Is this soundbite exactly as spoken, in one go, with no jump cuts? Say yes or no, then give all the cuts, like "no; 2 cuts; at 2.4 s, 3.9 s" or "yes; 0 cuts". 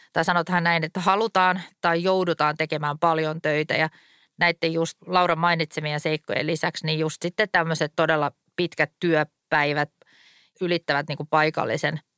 yes; 0 cuts